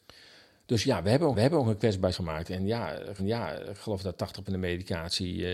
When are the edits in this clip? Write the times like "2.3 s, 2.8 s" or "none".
1.3 s, 2.1 s, 3.2 s, 4.5 s